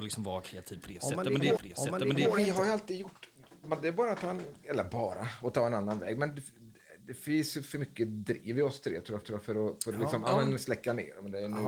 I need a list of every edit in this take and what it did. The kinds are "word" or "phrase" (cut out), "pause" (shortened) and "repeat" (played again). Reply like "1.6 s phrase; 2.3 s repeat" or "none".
1.6 s repeat; 9.2 s repeat